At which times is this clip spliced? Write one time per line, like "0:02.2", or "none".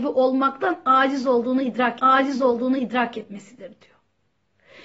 0:02.0